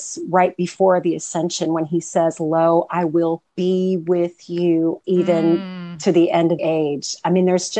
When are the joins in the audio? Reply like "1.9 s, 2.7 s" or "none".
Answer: 3.5 s, 5.0 s, 6.6 s